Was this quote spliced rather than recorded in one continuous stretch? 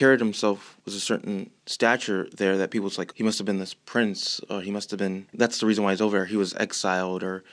no; 0 cuts

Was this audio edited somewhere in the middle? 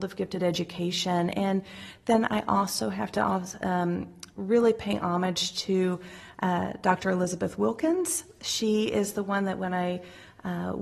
no; 0 cuts

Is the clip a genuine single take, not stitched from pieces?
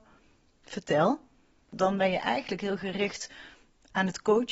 yes; 0 cuts

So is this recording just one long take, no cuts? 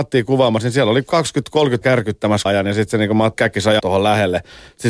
no; 4 cuts; at 1.8 s, 2.5 s, 3.4 s, 3.8 s

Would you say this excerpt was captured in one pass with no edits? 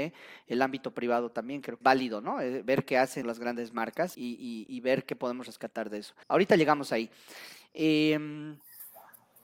no; 5 cuts; at 1.8 s, 3.2 s, 4.1 s, 4.7 s, 6.2 s

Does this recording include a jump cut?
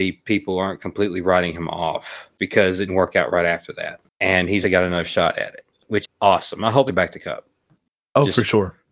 yes; 5 cuts; at 2.4 s, 2.9 s, 4.6 s, 6.0 s, 6.9 s

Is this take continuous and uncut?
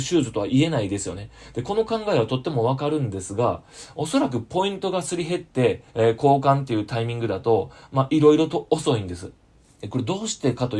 no; 2 cuts; at 5.9 s, 9.5 s

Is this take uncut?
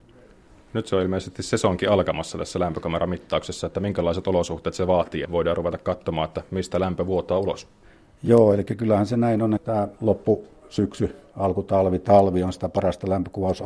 no; 3 cuts; at 5.2 s, 9.6 s, 10.0 s

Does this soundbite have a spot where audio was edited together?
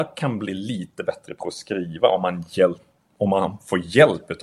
no; 0 cuts

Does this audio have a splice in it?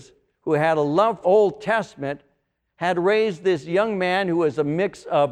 yes; 1 cut; at 1.2 s

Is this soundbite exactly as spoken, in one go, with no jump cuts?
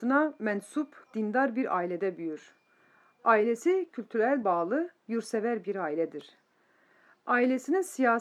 no; 3 cuts; at 1.0 s, 3.9 s, 4.4 s

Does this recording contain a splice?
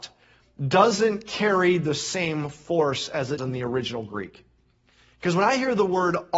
yes; 1 cut; at 3.4 s

